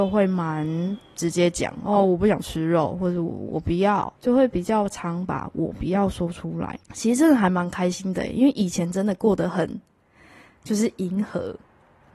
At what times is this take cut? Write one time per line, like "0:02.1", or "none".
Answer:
0:04.2
0:06.8